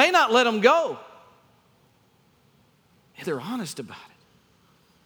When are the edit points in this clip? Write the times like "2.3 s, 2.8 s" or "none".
3.2 s